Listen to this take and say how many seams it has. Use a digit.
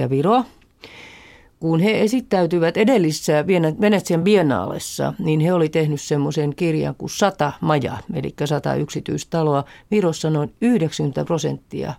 0